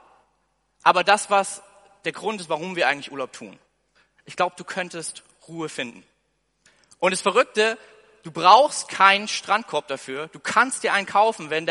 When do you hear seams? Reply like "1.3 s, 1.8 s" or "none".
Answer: none